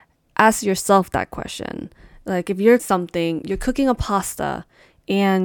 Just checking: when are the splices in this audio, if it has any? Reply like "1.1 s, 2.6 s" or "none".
2.8 s

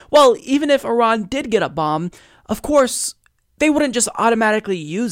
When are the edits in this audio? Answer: none

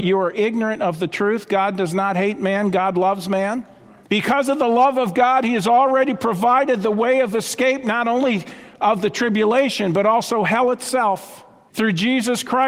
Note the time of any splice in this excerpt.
none

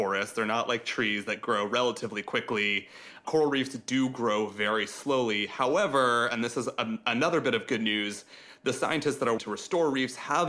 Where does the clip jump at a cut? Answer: 9.4 s

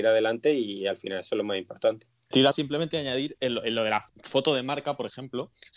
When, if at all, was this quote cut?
2.5 s, 4.1 s

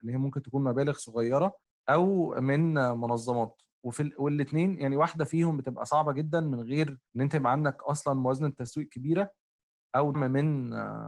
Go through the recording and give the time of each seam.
1.6 s, 7.1 s, 10.1 s

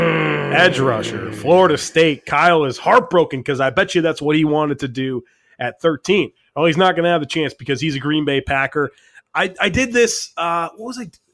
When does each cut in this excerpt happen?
none

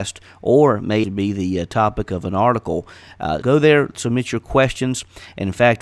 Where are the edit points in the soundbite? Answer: 1.0 s, 3.4 s

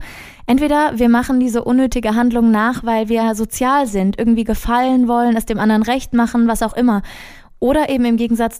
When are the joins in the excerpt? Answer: none

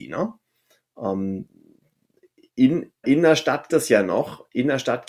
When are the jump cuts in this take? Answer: 3.0 s, 3.7 s

